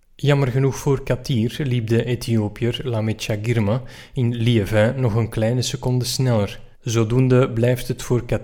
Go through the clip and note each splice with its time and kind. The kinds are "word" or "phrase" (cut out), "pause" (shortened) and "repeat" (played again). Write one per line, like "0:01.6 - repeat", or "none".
0:06.7 - pause